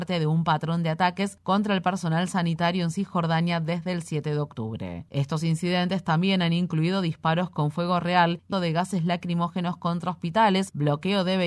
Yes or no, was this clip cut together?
yes